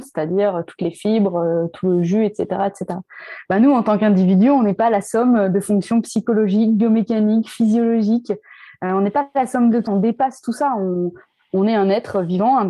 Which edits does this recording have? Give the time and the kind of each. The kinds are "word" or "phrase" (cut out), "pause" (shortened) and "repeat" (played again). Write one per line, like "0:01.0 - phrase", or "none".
0:09.9 - word

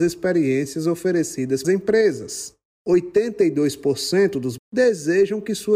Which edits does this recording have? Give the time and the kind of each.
0:01.6 - word
0:04.6 - word

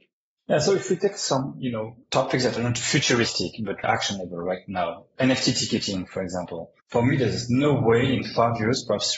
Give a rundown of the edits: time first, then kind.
0:02.0 - pause
0:03.8 - word
0:06.8 - pause

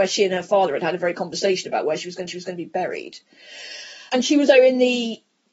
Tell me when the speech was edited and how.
0:01.1 - word
0:02.3 - repeat
0:04.5 - word

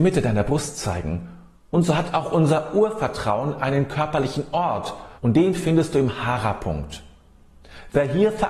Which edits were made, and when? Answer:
0:01.6 - pause
0:05.2 - pause

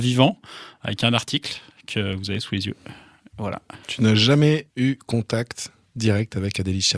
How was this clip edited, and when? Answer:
0:03.8 - pause
0:04.7 - pause

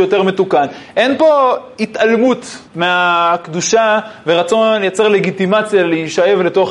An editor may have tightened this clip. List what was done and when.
0:02.7 - pause

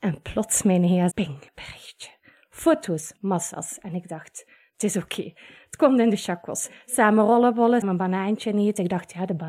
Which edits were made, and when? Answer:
0:01.1 - word
0:01.5 - pause
0:07.8 - word

